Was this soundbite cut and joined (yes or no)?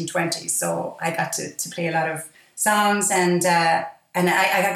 yes